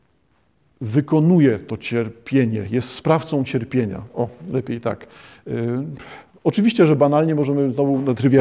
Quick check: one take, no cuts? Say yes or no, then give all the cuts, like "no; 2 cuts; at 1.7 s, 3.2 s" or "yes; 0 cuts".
yes; 0 cuts